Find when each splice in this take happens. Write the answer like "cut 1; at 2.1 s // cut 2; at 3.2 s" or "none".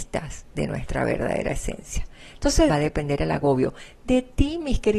cut 1; at 2.7 s